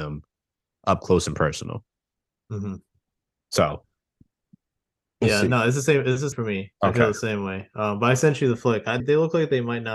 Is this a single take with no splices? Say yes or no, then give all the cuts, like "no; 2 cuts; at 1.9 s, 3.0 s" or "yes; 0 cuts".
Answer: no; 2 cuts; at 6.3 s, 9.0 s